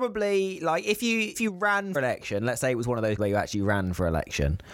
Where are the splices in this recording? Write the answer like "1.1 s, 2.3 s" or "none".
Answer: 1.3 s, 1.9 s, 3.2 s